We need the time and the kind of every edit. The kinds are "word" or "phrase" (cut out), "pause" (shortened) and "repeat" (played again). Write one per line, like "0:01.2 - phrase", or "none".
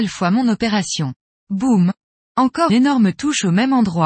0:01.2 - pause
0:02.7 - word